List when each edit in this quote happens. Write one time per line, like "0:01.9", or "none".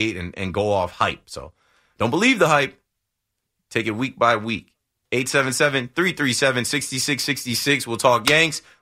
none